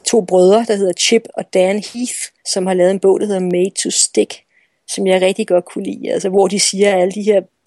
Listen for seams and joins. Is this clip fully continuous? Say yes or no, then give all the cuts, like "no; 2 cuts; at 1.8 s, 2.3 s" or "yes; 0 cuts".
no; 1 cut; at 2.4 s